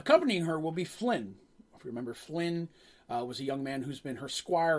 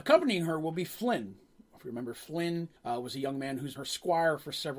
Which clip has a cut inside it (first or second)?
second